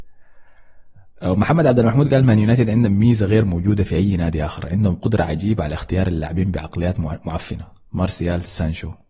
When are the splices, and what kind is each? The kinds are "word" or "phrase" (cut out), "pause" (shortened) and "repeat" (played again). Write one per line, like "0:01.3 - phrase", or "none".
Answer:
none

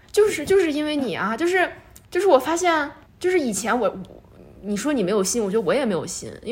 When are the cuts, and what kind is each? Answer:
0:02.0 - pause
0:03.1 - pause

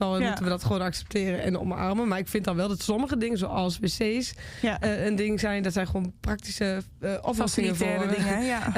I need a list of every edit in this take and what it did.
none

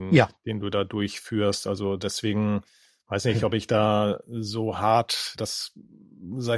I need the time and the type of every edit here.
none

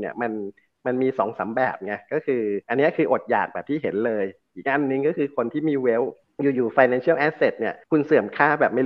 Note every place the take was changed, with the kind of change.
0:02.6 - pause
0:06.2 - pause
0:07.8 - pause

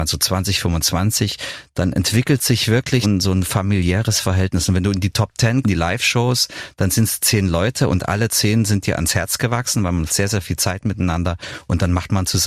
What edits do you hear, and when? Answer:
0:03.0 - word
0:05.6 - word
0:10.1 - word

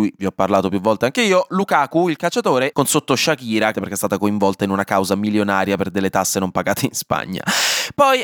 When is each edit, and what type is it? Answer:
0:02.7 - phrase
0:03.7 - phrase

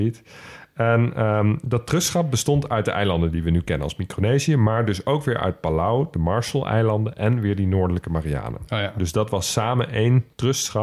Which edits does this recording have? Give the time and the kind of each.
none

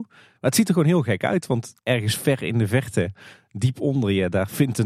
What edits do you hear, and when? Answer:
0:01.8 - pause

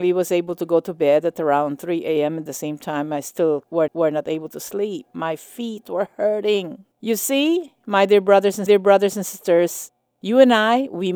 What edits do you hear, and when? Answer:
0:02.5 - phrase
0:03.9 - repeat
0:06.9 - pause
0:08.7 - repeat

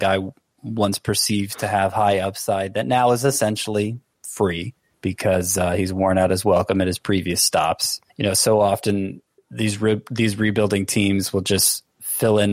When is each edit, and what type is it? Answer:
0:04.9 - pause
0:08.1 - pause
0:09.4 - pause

